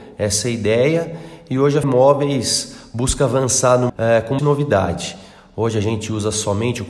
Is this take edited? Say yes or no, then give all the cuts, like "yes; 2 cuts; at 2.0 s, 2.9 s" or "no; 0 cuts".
yes; 3 cuts; at 1.8 s, 3.9 s, 4.4 s